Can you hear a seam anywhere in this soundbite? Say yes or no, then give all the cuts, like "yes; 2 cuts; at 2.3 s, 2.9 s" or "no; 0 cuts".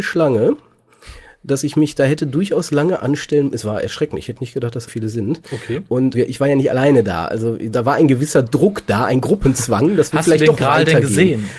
yes; 2 cuts; at 4.9 s, 6.1 s